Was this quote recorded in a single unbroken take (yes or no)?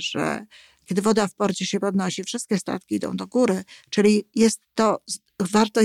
yes